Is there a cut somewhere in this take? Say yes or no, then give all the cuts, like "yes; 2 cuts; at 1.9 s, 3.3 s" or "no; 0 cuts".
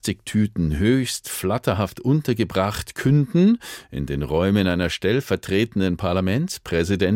no; 0 cuts